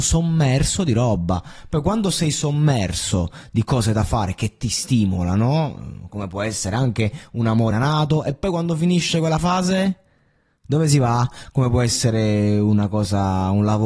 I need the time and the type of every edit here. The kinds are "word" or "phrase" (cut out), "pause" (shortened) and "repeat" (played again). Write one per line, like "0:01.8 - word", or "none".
0:07.7 - word

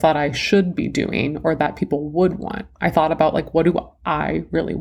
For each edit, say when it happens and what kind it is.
none

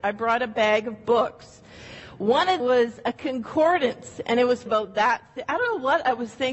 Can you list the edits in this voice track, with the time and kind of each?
0:02.6 - word
0:04.7 - word

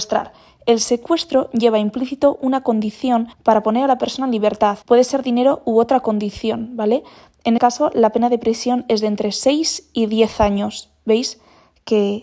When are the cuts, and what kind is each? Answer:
0:03.3 - pause
0:04.8 - pause
0:07.6 - word

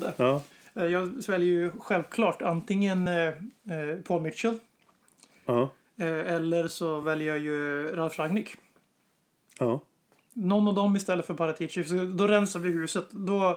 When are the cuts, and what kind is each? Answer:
none

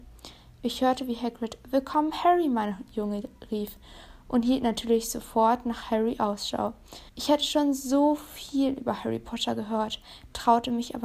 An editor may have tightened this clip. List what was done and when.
0:07.1 - pause

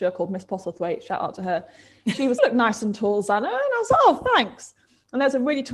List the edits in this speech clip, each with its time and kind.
0:02.4 - phrase

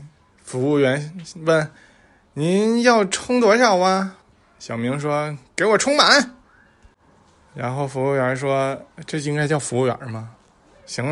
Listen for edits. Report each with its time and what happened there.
0:01.8 - pause
0:04.2 - pause
0:06.4 - pause

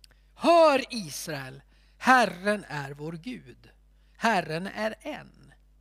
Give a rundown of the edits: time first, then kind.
none

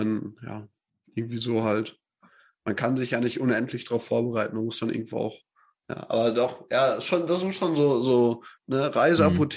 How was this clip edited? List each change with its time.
none

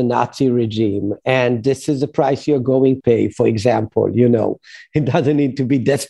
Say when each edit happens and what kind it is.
0:03.0 - word

